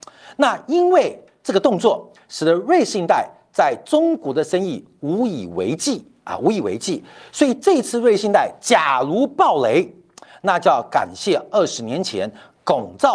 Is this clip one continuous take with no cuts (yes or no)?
yes